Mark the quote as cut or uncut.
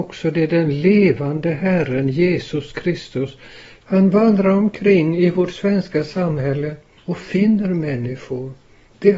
uncut